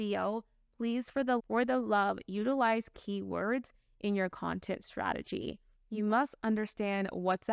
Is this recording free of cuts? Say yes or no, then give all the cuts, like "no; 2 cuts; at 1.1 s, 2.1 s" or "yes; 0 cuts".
no; 1 cut; at 1.4 s